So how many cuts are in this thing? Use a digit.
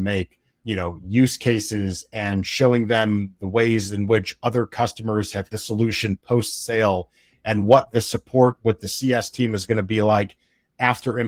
1